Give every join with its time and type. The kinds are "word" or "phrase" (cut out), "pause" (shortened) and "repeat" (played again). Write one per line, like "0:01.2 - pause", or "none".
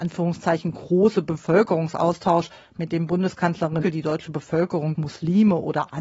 0:03.8 - word
0:04.9 - word